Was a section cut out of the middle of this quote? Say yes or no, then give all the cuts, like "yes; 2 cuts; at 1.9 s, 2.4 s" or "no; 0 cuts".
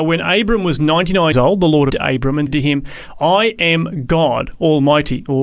yes; 3 cuts; at 1.3 s, 1.9 s, 2.5 s